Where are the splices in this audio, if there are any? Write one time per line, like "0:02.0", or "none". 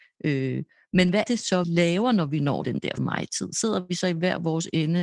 0:01.3
0:01.6
0:02.6
0:03.0